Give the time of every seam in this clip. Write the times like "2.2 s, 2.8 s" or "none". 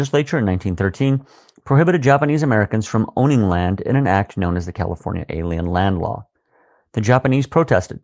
none